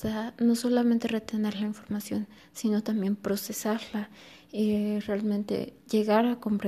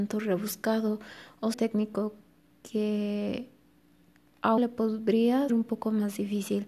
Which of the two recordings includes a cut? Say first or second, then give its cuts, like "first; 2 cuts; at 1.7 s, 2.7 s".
second; 3 cuts; at 1.5 s, 4.6 s, 5.5 s